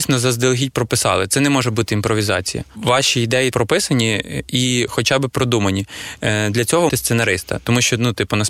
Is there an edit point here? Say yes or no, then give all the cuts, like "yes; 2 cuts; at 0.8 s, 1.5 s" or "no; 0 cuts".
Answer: yes; 2 cuts; at 3.5 s, 6.9 s